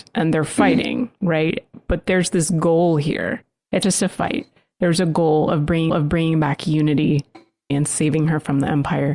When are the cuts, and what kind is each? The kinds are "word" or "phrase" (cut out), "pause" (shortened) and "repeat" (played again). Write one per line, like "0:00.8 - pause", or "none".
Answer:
0:03.8 - word
0:05.9 - repeat
0:07.7 - phrase